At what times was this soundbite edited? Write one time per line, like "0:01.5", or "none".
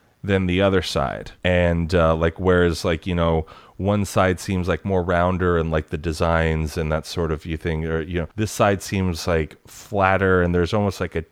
0:01.4
0:08.3